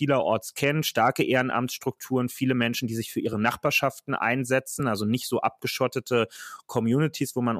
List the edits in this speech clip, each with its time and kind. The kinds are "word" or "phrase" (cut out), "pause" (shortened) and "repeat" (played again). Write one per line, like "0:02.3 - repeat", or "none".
none